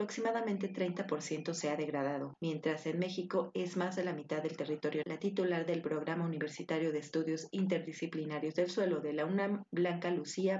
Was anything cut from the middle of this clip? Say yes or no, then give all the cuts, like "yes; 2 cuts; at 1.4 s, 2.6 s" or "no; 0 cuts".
yes; 1 cut; at 5.0 s